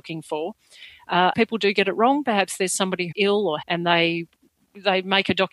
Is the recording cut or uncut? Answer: cut